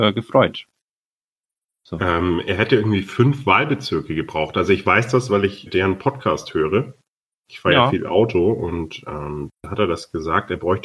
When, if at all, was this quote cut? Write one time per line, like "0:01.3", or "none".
0:05.7